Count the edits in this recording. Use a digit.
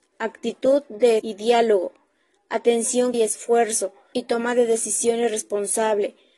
3